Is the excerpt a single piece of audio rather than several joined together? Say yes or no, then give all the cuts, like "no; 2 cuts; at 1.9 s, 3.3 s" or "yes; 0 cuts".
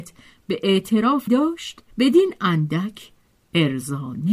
no; 2 cuts; at 1.3 s, 1.9 s